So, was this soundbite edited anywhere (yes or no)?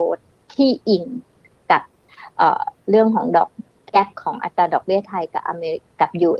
no